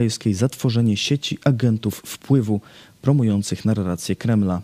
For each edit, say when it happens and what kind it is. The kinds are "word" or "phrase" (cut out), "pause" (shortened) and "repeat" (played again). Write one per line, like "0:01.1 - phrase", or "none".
none